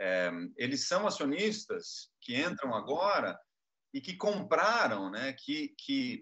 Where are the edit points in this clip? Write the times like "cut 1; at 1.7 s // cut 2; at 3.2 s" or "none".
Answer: none